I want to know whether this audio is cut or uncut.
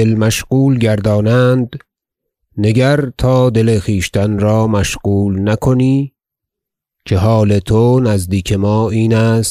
uncut